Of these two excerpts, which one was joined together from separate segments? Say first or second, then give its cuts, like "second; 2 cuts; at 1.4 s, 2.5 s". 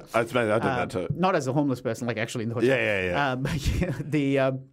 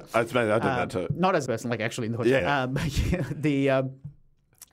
second; 2 cuts; at 1.5 s, 2.4 s